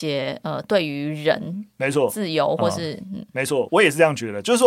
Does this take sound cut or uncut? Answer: uncut